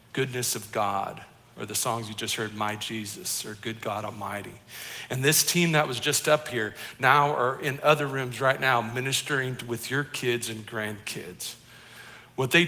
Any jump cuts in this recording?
no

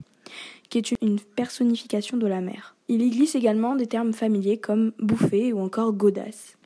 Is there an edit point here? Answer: yes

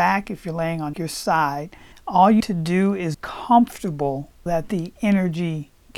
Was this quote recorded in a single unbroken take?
no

